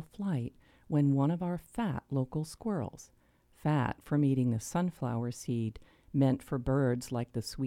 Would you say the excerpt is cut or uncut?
uncut